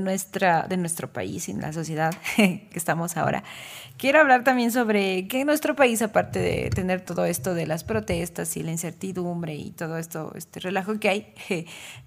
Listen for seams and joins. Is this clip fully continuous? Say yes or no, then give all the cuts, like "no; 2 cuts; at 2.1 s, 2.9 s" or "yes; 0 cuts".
no; 1 cut; at 2.7 s